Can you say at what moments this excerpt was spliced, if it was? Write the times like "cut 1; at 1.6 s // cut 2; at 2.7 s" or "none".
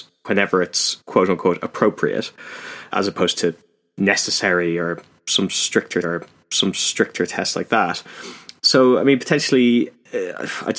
cut 1; at 1.0 s // cut 2; at 2.9 s // cut 3; at 6.0 s